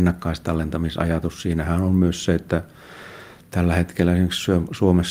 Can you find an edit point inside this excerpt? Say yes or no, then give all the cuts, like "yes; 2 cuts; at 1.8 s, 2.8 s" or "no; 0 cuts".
no; 0 cuts